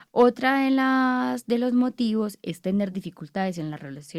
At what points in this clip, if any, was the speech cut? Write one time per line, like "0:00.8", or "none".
none